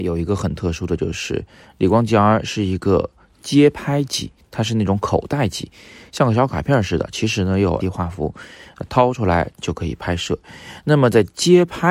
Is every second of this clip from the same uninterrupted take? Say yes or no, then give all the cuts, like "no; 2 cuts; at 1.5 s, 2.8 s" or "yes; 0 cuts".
no; 1 cut; at 7.8 s